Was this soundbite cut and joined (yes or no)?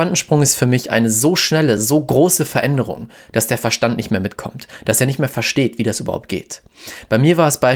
no